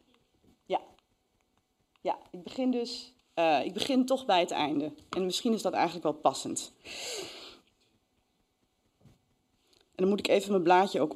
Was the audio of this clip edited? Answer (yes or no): no